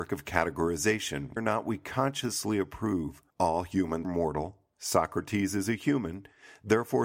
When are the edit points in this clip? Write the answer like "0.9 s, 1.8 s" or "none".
1.4 s, 3.3 s, 4.0 s